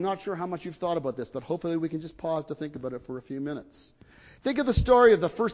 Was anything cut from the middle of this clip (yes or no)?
no